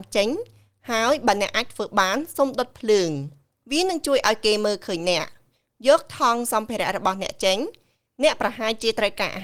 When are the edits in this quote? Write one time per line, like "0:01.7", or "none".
none